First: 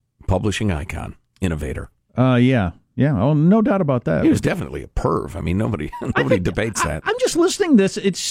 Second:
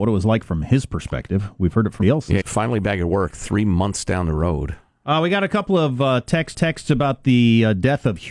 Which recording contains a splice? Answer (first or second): second